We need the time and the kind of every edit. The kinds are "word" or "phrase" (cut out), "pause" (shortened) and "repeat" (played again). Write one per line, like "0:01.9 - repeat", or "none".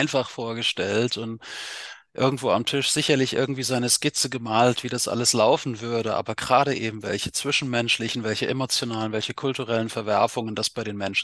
none